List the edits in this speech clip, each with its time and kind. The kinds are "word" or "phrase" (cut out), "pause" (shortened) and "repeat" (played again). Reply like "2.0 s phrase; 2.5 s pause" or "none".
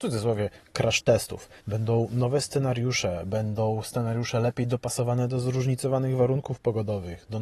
1.6 s pause